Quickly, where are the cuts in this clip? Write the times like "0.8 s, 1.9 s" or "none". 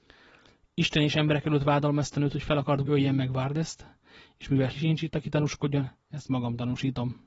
2.9 s, 4.7 s